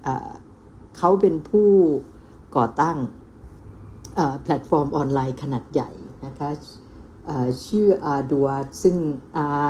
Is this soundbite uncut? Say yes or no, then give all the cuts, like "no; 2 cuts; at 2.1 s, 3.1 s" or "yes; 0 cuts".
yes; 0 cuts